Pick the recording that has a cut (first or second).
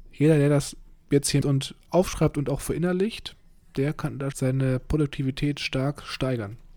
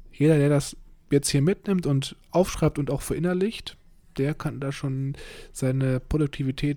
first